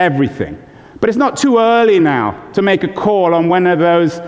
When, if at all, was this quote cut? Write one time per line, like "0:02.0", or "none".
none